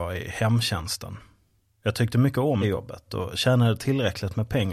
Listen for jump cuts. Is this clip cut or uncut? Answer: cut